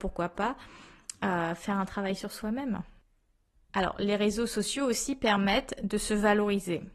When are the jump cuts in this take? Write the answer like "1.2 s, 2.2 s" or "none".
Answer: none

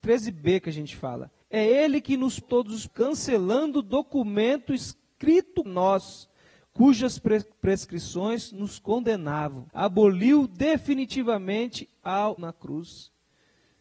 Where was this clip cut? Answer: 1.4 s, 2.4 s, 2.9 s, 5.7 s, 7.5 s, 9.7 s, 12.4 s

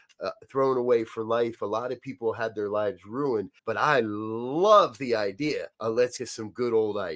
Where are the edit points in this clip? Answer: 3.6 s, 5.7 s, 6.2 s

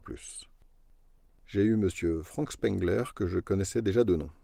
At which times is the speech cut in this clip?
none

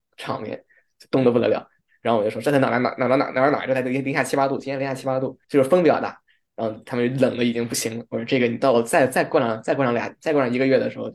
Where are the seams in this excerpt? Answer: 5.4 s

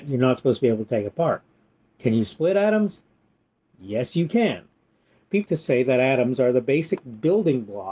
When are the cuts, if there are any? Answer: 5.5 s

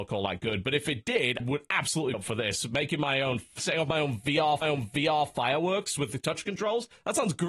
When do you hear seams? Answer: 1.4 s, 2.1 s, 4.6 s

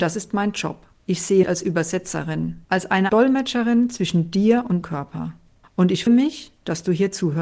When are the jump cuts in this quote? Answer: 0.9 s, 1.4 s, 2.6 s, 3.1 s, 4.8 s, 5.6 s, 6.1 s

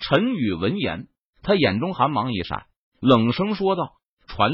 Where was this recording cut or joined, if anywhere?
none

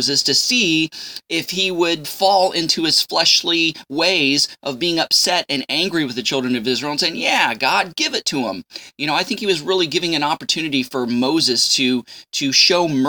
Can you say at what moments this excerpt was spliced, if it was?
2.0 s

